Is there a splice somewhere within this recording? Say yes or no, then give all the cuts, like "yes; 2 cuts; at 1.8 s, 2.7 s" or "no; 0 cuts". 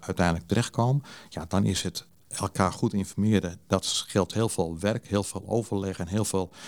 no; 0 cuts